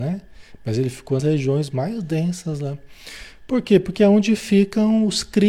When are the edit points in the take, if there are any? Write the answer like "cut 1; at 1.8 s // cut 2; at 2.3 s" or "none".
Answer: cut 1; at 1.2 s